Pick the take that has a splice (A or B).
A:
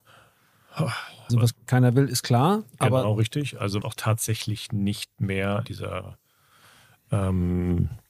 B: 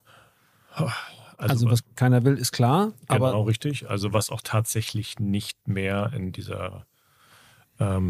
A